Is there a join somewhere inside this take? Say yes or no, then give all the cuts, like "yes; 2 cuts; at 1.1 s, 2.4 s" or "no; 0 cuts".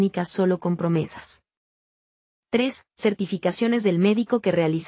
no; 0 cuts